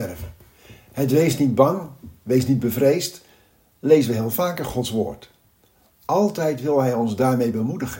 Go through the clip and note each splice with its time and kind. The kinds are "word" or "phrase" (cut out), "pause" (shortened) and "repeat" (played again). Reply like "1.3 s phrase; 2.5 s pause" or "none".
none